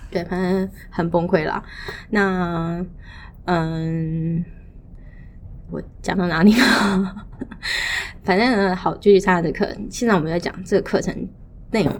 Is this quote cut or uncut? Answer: cut